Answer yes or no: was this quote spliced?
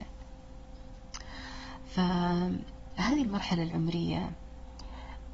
no